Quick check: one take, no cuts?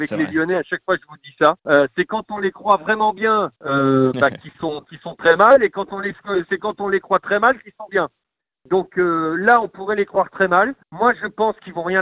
no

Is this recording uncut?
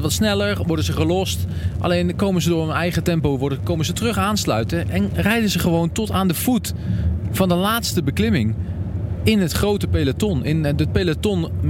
yes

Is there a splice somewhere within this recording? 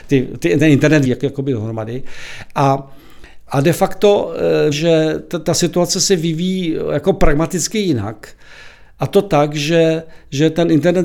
yes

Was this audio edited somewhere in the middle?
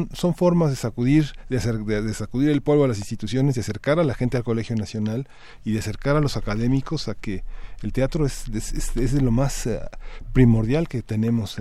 no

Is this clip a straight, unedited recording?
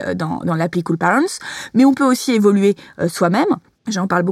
yes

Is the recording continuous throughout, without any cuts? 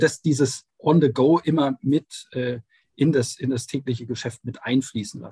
yes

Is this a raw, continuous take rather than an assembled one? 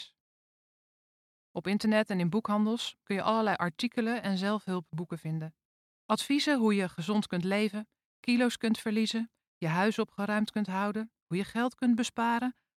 yes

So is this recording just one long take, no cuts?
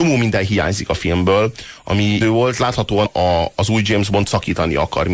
no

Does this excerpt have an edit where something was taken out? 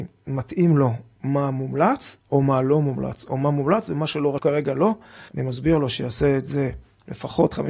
yes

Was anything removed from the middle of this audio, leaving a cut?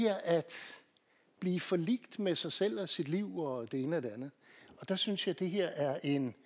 no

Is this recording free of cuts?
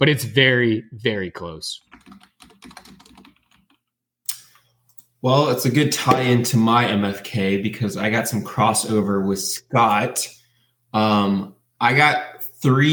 yes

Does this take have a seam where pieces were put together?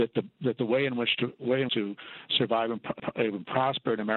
yes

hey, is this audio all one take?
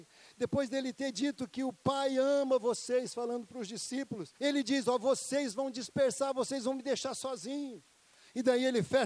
no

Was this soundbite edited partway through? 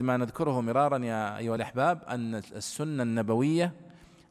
no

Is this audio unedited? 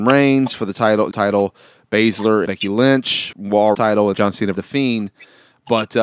no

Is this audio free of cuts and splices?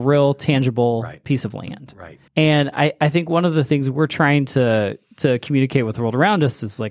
no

